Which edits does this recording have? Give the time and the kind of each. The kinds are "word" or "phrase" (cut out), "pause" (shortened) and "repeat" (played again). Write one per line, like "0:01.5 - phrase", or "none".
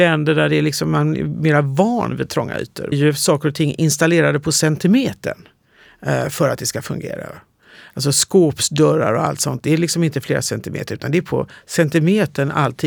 0:02.9 - phrase

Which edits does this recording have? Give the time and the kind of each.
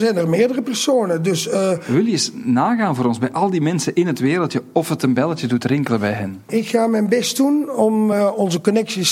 none

